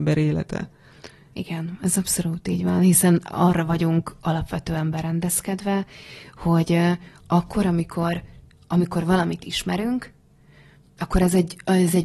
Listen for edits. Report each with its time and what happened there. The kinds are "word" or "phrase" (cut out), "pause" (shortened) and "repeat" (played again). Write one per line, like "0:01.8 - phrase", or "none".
none